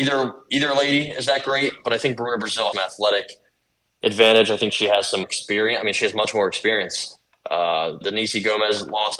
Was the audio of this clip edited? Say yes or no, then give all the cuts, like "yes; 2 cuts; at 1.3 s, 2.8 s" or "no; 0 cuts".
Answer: yes; 3 cuts; at 2.7 s, 5.2 s, 8.0 s